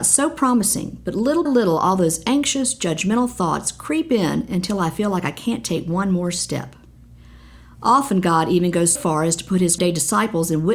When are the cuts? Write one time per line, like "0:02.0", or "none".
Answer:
0:01.5
0:09.0
0:09.8